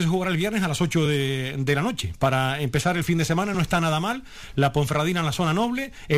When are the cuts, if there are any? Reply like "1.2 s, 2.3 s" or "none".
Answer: none